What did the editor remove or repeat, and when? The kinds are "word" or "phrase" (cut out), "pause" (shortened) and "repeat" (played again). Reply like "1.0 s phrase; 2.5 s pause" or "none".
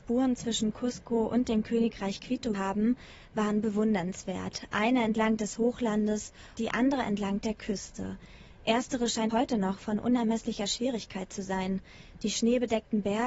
2.5 s word; 6.6 s word; 9.3 s word